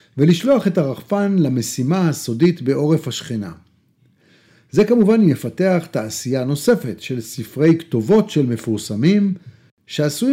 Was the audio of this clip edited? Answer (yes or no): no